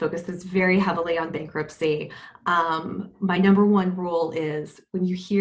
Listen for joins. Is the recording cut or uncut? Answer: uncut